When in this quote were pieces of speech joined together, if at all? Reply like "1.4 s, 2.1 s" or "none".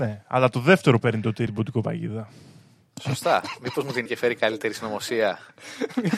1.0 s, 1.5 s, 4.1 s